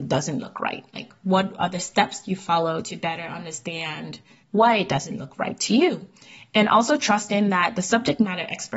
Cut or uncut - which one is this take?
cut